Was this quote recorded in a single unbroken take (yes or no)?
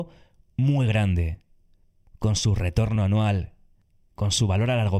yes